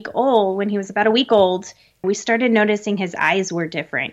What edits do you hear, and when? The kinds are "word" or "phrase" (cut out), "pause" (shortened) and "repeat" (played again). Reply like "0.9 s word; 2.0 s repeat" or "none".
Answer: 2.0 s word